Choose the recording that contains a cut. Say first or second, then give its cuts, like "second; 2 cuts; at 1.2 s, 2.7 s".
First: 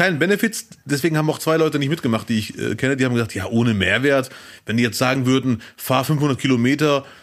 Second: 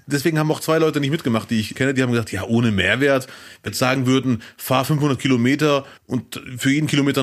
second; 3 cuts; at 1.7 s, 3.7 s, 6.0 s